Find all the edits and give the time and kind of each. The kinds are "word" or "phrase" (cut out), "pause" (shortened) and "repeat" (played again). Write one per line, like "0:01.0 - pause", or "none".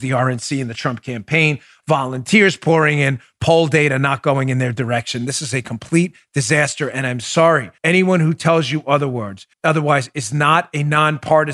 0:07.8 - pause
0:09.5 - pause